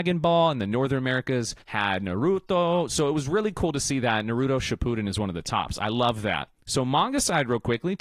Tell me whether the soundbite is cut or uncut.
cut